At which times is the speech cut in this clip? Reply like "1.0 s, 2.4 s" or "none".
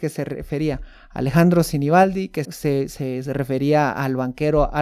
2.4 s